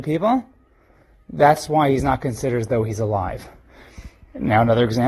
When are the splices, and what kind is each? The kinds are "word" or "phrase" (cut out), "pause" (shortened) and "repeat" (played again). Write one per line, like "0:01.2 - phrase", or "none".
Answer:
none